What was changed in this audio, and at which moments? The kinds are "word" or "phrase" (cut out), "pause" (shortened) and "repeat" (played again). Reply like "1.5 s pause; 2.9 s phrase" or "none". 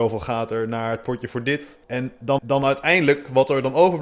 1.8 s pause; 2.4 s repeat

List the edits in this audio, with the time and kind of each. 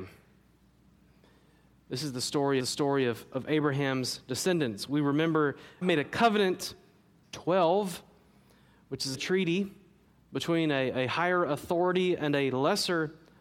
2.6 s repeat; 5.8 s word; 7.2 s phrase; 9.1 s word; 10.1 s pause

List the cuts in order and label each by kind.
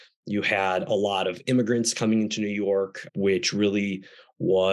3.1 s word

